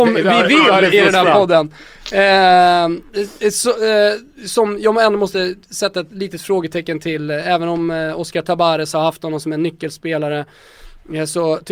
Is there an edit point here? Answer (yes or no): no